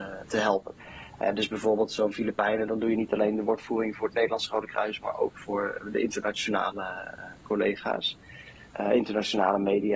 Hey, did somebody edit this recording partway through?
yes; 1 cut; at 8.7 s

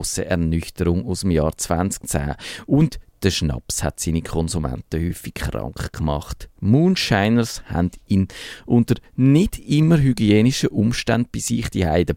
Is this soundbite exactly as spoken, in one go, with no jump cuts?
yes; 0 cuts

